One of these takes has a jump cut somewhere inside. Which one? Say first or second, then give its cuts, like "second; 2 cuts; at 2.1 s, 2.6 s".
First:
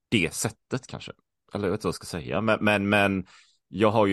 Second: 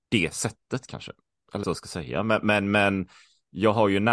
second; 1 cut; at 1.6 s